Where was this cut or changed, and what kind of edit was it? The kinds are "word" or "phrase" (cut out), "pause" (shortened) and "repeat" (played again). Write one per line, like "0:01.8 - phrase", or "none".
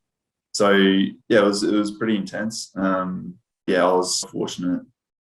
0:01.2 - pause
0:03.7 - word
0:04.2 - word